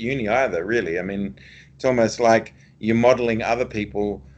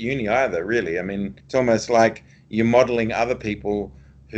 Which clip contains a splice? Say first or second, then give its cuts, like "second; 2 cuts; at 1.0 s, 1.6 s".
second; 1 cut; at 1.4 s